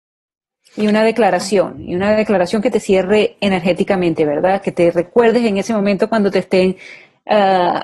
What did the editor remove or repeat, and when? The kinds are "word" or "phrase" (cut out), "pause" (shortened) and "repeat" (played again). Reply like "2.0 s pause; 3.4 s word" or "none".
none